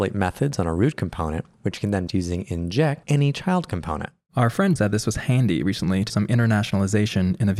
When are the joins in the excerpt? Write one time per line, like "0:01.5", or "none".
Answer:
0:02.1
0:03.0
0:04.8
0:06.1